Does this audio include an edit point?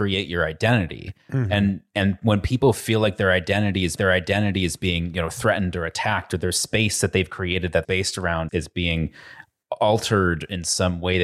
yes; 3 cuts; at 4.0 s, 7.8 s, 8.5 s

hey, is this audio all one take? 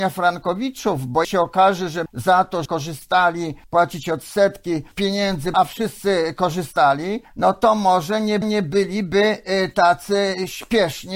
no; 8 cuts; at 1.2 s, 2.1 s, 2.7 s, 3.6 s, 4.9 s, 5.5 s, 7.2 s, 8.4 s

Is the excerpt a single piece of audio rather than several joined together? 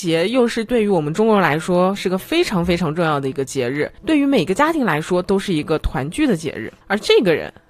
no; 1 cut; at 4.0 s

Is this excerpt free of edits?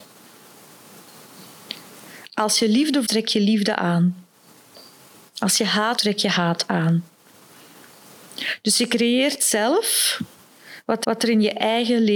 no; 3 cuts; at 3.1 s, 6.0 s, 11.0 s

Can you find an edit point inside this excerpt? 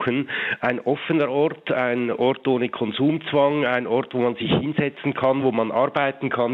no; 0 cuts

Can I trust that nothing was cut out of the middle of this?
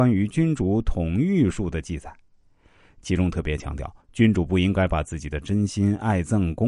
no; 1 cut; at 4.0 s

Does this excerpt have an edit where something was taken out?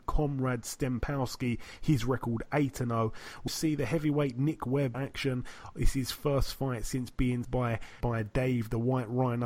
yes; 4 cuts; at 3.5 s, 4.9 s, 7.4 s, 8.0 s

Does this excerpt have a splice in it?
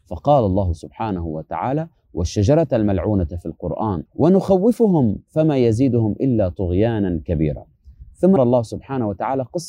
yes; 2 cuts; at 4.1 s, 8.4 s

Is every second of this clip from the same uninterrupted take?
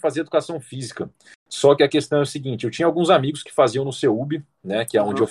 yes; 0 cuts

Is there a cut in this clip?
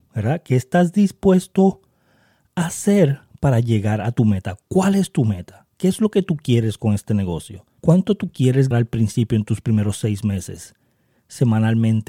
yes; 2 cuts; at 7.8 s, 8.7 s

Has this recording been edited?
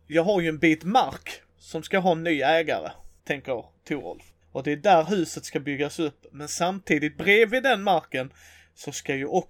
yes; 2 cuts; at 3.2 s, 4.4 s

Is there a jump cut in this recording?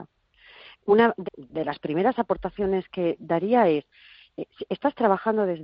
yes; 1 cut; at 1.3 s

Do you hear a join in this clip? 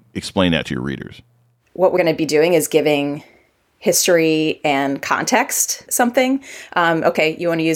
yes; 2 cuts; at 2.0 s, 5.9 s

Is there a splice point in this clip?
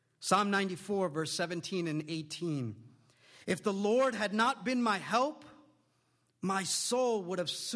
no; 0 cuts

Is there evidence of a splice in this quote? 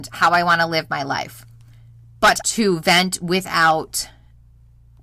yes; 1 cut; at 2.4 s

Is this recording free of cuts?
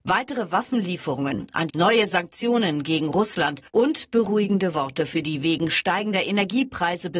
no; 2 cuts; at 1.7 s, 3.7 s

